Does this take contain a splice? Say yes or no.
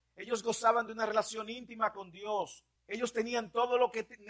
yes